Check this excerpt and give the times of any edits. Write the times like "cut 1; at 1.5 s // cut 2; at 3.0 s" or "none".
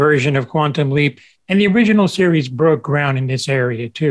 none